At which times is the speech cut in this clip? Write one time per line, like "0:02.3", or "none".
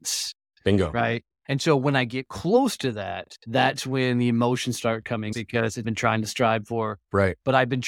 0:03.4
0:05.3
0:05.8